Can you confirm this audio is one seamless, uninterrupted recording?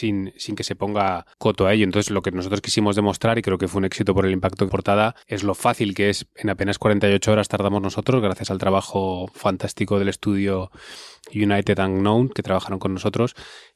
no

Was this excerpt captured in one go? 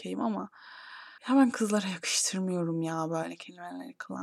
no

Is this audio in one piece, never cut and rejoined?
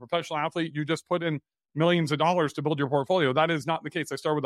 yes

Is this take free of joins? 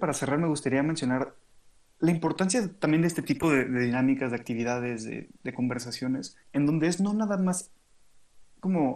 no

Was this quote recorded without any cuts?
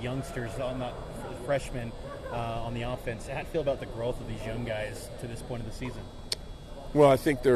no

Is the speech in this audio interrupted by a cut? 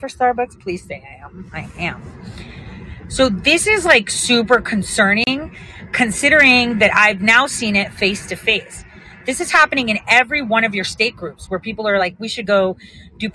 no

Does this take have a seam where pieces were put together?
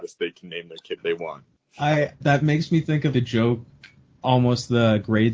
yes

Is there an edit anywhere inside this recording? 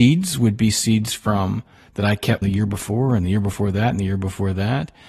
yes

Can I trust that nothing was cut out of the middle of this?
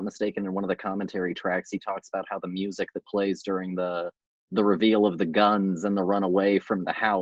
no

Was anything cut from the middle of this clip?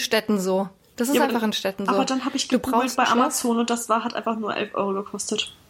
no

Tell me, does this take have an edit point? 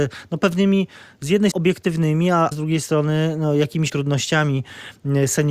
yes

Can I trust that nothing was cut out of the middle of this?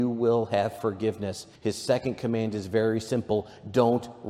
no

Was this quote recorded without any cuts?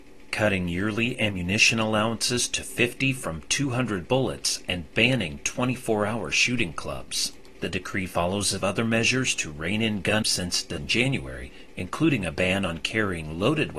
no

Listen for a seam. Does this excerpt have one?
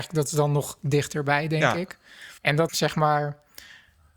yes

